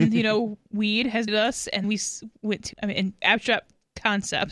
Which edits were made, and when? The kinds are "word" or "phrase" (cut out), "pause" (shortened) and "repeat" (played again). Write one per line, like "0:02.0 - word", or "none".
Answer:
0:01.3 - word
0:01.8 - word
0:02.7 - word
0:03.2 - word